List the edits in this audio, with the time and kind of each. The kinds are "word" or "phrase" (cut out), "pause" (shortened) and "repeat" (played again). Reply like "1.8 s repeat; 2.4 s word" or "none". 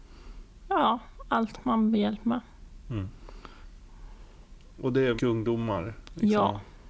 1.9 s word; 5.2 s word